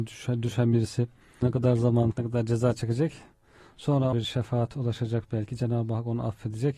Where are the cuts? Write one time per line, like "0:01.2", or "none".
0:01.4
0:02.1
0:04.1